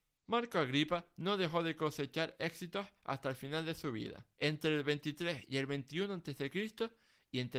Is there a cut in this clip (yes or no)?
yes